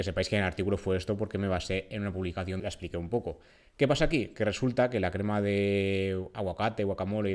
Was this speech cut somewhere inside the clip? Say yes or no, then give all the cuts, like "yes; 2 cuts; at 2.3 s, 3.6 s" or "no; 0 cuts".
yes; 1 cut; at 2.6 s